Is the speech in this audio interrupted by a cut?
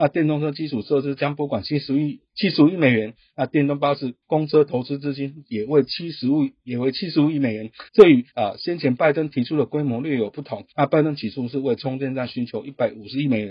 yes; 5 cuts; at 2.3 s, 4.2 s, 7.9 s, 8.3 s, 10.7 s

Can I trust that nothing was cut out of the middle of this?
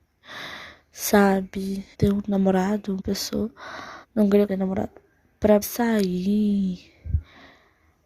no; 5 cuts; at 1.9 s, 3.0 s, 4.0 s, 4.5 s, 5.6 s

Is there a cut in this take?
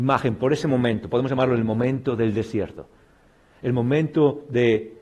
no; 0 cuts

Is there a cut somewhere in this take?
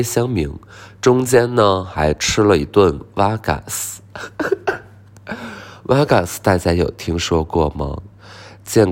no; 0 cuts

